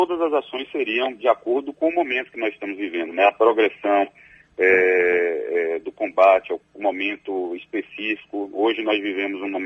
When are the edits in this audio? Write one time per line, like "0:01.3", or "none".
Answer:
0:06.6